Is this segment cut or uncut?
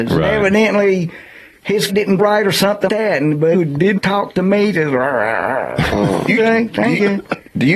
cut